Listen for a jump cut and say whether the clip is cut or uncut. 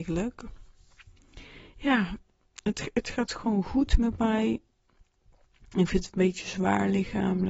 uncut